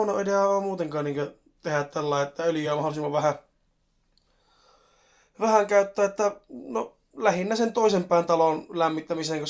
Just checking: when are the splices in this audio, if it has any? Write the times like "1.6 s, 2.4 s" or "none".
none